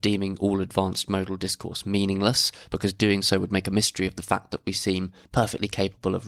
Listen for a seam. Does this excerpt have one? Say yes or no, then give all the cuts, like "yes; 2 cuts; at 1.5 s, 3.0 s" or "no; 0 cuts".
no; 0 cuts